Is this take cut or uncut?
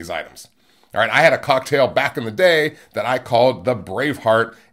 uncut